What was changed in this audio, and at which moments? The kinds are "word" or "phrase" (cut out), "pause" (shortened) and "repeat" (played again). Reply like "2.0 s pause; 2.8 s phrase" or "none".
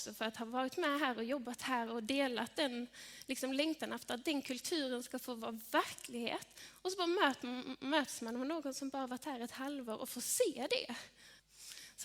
none